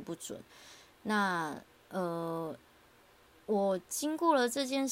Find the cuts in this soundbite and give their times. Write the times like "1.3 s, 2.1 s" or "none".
none